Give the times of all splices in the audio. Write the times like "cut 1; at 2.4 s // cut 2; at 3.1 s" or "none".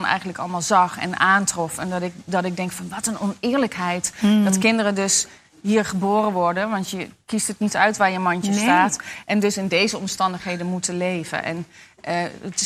none